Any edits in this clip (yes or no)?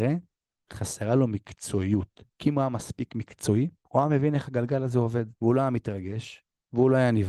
yes